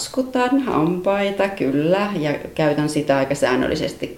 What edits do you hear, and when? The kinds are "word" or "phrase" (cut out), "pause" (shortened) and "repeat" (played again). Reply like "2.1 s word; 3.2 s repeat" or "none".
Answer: none

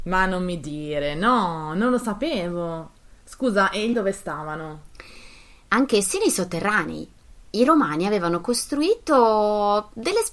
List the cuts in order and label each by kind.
3.9 s word

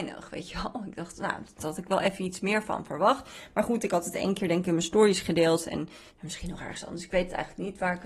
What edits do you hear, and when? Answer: 6.1 s pause

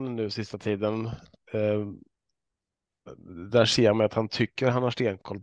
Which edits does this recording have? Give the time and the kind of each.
none

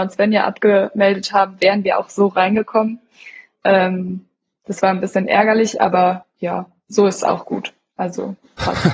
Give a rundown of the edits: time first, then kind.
none

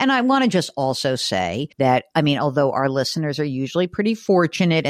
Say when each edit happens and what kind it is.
1.7 s pause

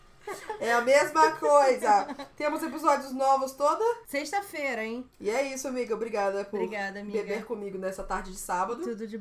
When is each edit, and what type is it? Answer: none

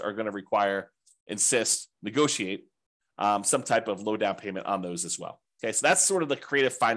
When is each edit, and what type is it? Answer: none

